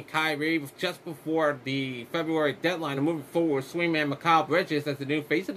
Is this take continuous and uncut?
yes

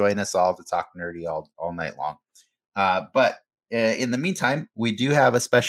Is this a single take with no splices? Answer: yes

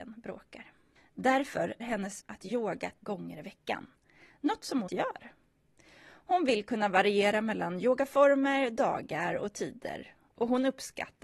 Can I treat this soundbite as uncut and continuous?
no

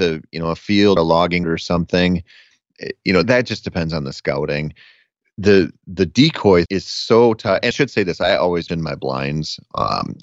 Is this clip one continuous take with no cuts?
no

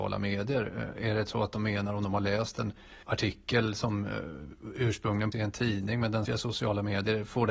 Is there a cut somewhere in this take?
yes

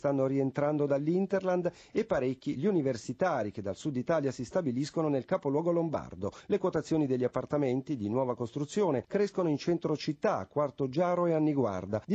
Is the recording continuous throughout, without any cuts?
yes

